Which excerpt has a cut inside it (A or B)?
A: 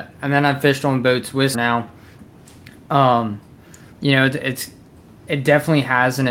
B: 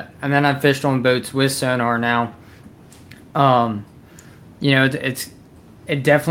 A